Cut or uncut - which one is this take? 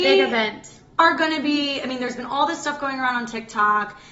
uncut